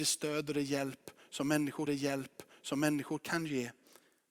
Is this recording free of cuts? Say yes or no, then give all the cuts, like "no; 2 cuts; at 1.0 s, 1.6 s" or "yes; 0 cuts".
no; 1 cut; at 1.9 s